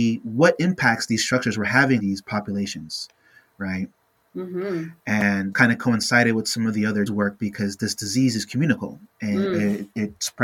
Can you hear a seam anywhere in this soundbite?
yes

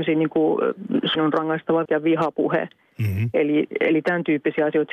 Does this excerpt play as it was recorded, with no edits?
no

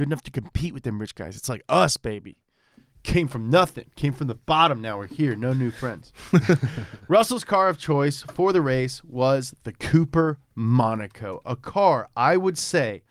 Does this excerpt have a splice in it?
no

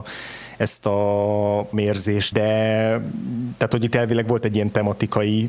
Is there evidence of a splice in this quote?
yes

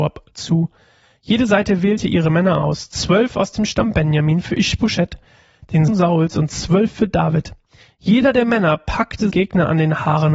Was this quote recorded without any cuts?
no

